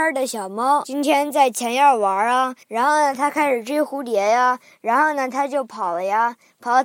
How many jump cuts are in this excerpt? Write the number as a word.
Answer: one